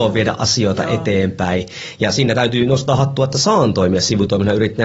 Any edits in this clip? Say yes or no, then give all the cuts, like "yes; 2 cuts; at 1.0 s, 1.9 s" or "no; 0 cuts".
no; 0 cuts